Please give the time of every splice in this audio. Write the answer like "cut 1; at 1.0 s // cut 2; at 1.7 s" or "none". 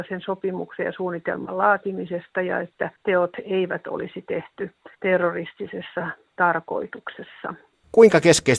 cut 1; at 3.0 s // cut 2; at 4.9 s

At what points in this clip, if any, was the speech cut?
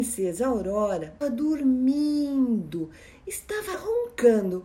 cut 1; at 1.2 s // cut 2; at 3.7 s

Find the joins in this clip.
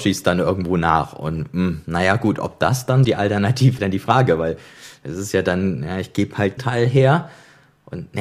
cut 1; at 3.0 s // cut 2; at 3.8 s // cut 3; at 6.6 s

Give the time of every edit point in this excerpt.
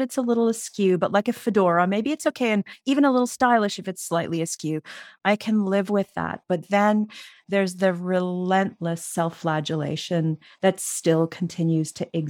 none

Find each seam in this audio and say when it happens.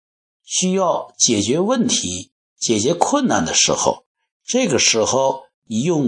none

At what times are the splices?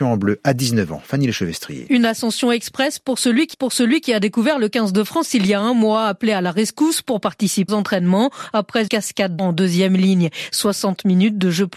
cut 1; at 3.5 s // cut 2; at 7.7 s // cut 3; at 8.9 s // cut 4; at 9.4 s

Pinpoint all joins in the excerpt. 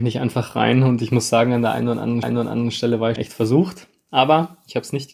cut 1; at 2.2 s // cut 2; at 3.2 s

